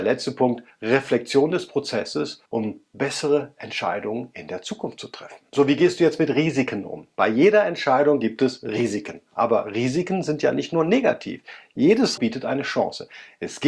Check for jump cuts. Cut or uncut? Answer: cut